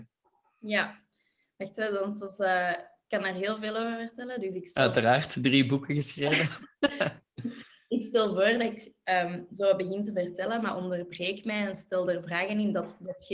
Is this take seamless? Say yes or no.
yes